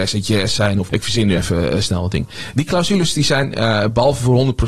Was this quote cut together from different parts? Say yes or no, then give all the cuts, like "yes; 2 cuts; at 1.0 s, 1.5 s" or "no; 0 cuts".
no; 0 cuts